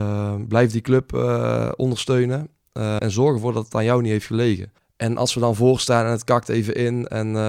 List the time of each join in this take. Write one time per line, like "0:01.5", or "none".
0:03.0
0:04.8